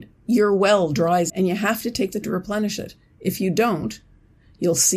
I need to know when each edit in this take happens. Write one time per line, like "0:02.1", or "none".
0:01.3
0:02.2